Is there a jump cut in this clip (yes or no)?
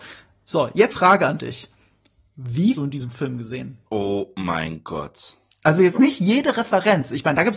yes